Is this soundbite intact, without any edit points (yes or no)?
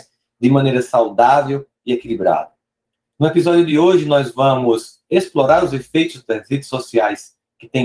yes